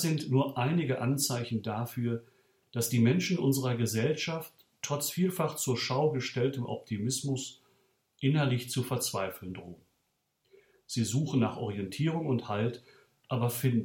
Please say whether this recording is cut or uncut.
uncut